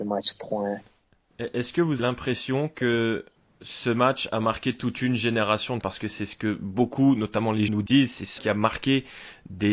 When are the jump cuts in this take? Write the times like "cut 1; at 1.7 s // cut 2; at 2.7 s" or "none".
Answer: cut 1; at 2.0 s // cut 2; at 5.8 s // cut 3; at 7.7 s // cut 4; at 8.4 s